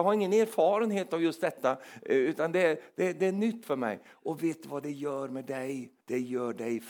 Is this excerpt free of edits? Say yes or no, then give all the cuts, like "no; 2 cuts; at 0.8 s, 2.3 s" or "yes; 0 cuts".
no; 1 cut; at 6.0 s